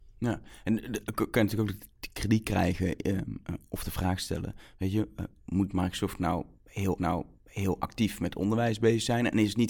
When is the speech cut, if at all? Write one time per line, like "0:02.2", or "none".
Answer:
0:07.0